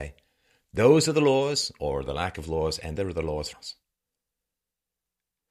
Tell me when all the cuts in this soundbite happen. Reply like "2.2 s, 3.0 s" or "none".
3.0 s, 3.5 s